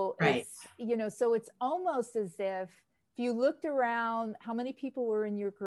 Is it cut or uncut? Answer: uncut